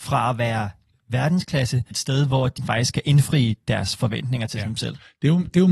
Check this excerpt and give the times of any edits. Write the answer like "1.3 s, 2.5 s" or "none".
0.9 s, 1.9 s, 2.6 s